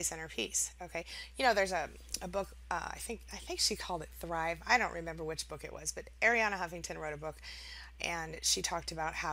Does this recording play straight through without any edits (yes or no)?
yes